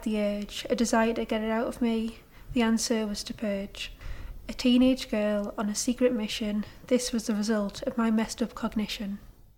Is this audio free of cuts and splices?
yes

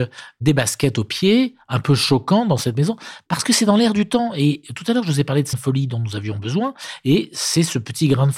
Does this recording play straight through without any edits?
no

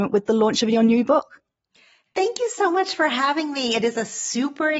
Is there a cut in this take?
no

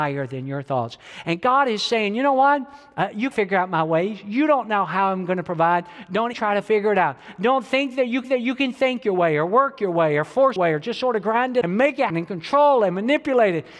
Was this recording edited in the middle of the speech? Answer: yes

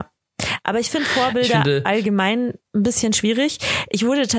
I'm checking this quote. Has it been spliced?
no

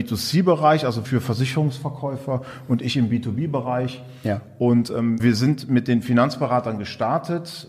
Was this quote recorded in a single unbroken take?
no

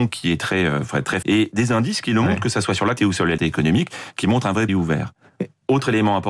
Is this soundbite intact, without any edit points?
no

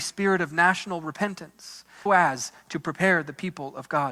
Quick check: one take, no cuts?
no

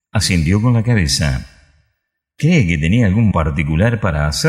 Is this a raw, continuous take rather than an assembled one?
no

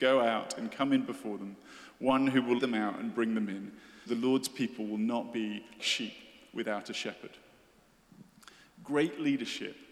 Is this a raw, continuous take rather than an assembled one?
no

